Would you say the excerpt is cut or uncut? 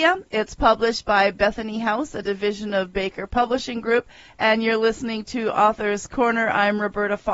uncut